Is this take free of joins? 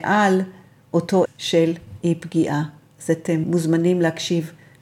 no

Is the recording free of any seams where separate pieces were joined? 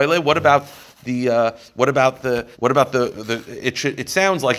no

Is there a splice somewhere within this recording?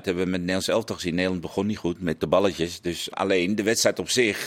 yes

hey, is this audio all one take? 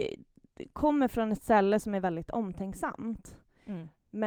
yes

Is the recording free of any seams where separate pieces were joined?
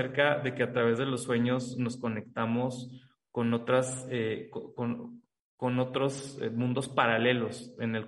yes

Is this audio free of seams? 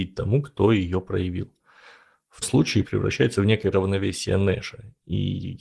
no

